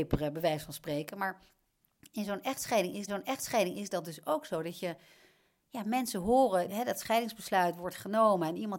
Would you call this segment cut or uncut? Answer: cut